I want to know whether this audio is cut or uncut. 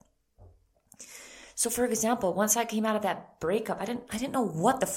uncut